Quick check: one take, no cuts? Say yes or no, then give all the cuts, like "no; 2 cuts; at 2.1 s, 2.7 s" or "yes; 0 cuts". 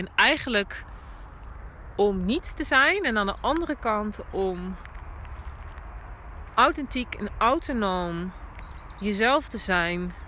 yes; 0 cuts